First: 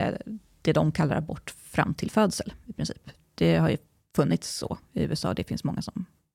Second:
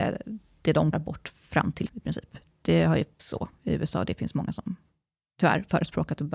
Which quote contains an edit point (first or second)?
second